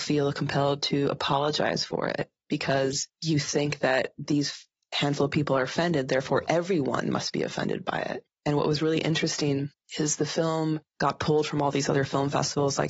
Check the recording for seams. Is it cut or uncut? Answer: uncut